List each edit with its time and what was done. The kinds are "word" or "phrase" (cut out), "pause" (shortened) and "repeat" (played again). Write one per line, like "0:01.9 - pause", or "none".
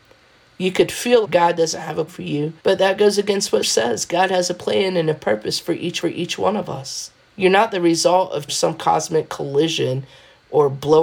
0:01.2 - word
0:02.1 - word
0:02.6 - pause
0:03.6 - word
0:06.0 - repeat
0:07.2 - pause
0:08.5 - phrase